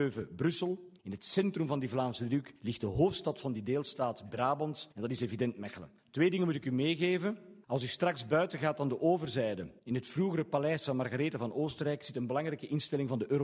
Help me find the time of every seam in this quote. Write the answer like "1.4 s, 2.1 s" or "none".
1.0 s, 2.6 s, 4.9 s, 6.0 s, 7.6 s, 9.8 s